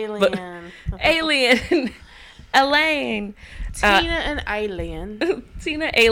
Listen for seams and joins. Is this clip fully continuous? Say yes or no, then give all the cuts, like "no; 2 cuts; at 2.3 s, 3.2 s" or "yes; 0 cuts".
yes; 0 cuts